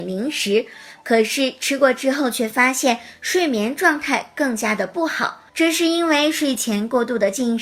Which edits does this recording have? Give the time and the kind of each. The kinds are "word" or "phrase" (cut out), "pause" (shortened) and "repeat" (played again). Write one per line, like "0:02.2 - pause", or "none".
0:05.5 - pause

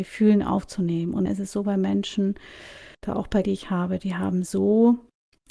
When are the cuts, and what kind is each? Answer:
0:01.3 - word
0:02.9 - pause
0:03.4 - word

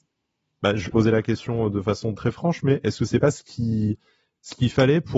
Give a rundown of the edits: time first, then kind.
0:00.9 - word
0:02.1 - word

